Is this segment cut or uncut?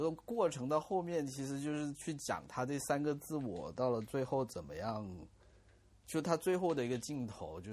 uncut